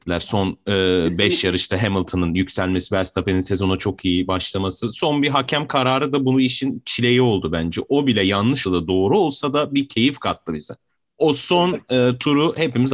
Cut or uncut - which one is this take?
cut